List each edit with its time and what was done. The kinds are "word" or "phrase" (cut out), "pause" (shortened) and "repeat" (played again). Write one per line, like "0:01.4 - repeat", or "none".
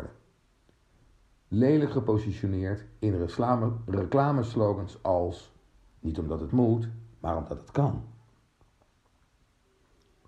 none